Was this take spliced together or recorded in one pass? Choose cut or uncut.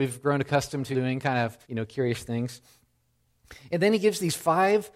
cut